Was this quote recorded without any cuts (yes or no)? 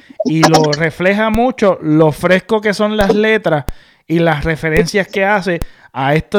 yes